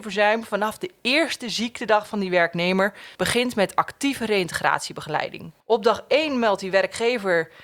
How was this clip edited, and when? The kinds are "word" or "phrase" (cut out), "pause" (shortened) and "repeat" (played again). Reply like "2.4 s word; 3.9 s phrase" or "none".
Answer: 3.1 s pause; 5.6 s pause